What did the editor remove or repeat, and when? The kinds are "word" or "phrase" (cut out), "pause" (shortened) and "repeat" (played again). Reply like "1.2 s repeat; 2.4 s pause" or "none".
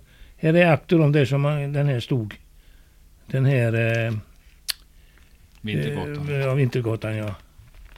none